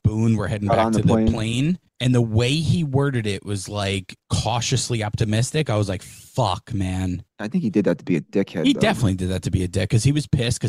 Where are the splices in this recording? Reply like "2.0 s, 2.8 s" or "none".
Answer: 1.9 s, 4.2 s, 7.3 s